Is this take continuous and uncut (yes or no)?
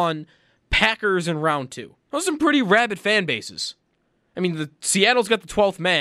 no